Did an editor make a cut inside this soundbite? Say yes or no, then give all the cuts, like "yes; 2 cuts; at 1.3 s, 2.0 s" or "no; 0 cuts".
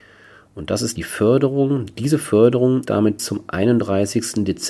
yes; 3 cuts; at 1.0 s, 2.9 s, 3.2 s